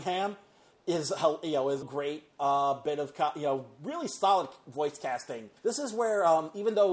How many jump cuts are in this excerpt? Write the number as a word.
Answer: two